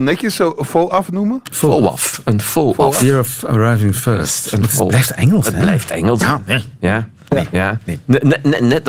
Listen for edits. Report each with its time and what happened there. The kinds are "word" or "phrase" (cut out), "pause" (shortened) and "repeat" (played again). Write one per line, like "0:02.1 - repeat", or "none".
none